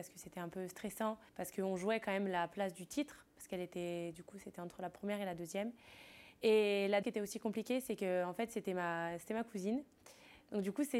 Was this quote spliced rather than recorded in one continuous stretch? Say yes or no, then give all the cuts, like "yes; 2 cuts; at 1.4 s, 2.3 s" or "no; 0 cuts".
yes; 2 cuts; at 1.3 s, 7.0 s